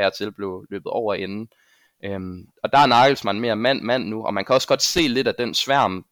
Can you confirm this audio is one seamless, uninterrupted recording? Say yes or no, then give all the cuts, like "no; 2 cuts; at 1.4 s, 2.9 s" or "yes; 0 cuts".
no; 1 cut; at 2.5 s